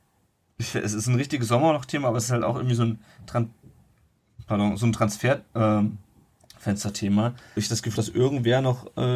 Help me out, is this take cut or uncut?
cut